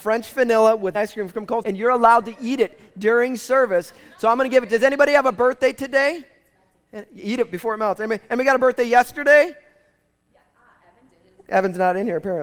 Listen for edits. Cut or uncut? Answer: cut